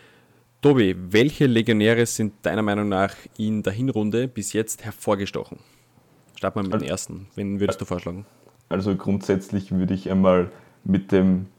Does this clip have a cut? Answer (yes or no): no